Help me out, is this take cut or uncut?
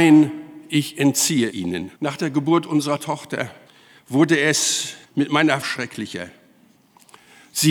cut